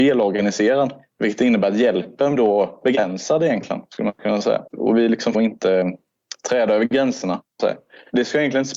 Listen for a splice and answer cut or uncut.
cut